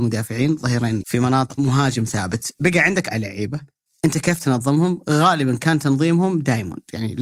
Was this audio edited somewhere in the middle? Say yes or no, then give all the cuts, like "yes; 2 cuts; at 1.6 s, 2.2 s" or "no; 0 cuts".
yes; 4 cuts; at 1.0 s, 1.6 s, 3.1 s, 3.9 s